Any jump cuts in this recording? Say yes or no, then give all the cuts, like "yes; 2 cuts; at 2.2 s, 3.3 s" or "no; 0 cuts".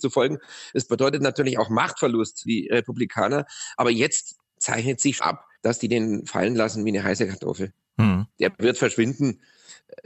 yes; 4 cuts; at 2.5 s, 5.2 s, 5.6 s, 8.3 s